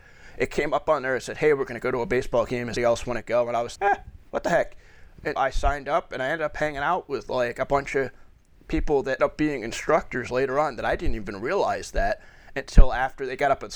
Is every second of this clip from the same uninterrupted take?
no; 4 cuts; at 2.8 s, 3.8 s, 5.4 s, 9.2 s

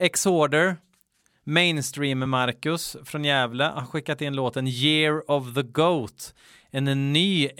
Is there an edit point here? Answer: no; 0 cuts

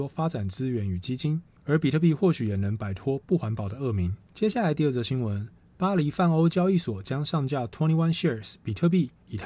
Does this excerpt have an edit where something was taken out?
no; 0 cuts

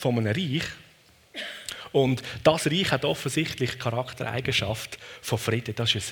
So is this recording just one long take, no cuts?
yes; 0 cuts

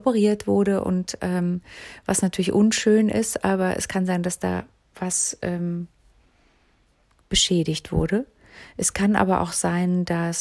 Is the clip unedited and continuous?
yes; 0 cuts

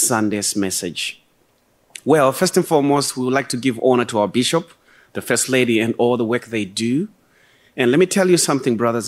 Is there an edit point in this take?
no; 0 cuts

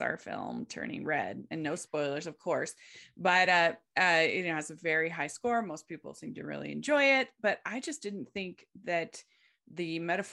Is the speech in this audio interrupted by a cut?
no; 0 cuts

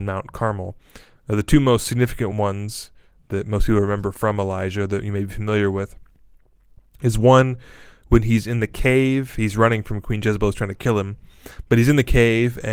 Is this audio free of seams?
yes; 0 cuts

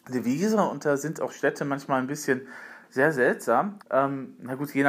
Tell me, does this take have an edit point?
yes; 1 cut; at 3.8 s

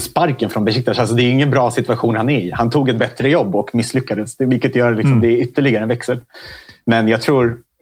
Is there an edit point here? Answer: no; 0 cuts

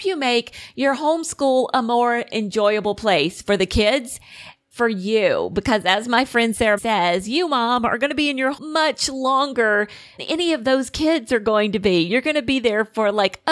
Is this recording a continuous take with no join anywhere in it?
no; 4 cuts; at 4.7 s, 6.8 s, 8.6 s, 10.2 s

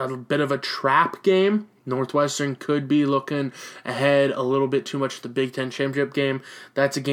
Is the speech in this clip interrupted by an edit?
yes; 1 cut; at 1.8 s

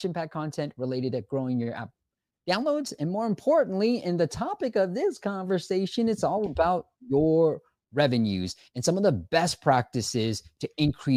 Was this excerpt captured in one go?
yes; 0 cuts

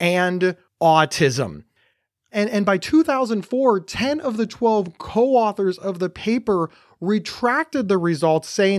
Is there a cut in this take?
no; 0 cuts

